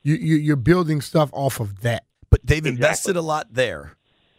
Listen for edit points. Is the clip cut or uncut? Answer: cut